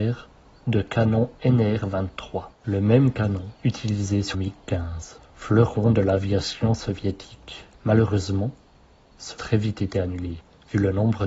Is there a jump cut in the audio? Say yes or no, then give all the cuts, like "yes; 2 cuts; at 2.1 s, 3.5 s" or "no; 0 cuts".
yes; 6 cuts; at 2.5 s, 3.6 s, 4.3 s, 5.2 s, 7.7 s, 9.4 s